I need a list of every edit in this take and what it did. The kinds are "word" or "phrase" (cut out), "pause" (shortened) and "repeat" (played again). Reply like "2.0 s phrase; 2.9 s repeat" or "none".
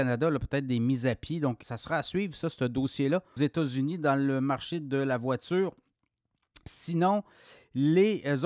1.6 s word; 3.4 s phrase